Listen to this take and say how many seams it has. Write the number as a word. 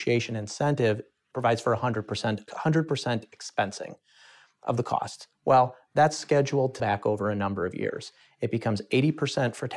two